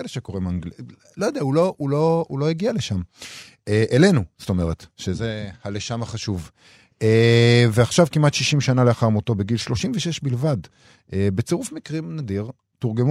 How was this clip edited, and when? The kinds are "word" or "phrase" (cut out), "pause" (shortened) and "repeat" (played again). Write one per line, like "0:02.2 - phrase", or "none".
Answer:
none